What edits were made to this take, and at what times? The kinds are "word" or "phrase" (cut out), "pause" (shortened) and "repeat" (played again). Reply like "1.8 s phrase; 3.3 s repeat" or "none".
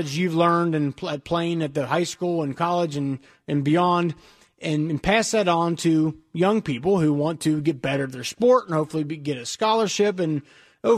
none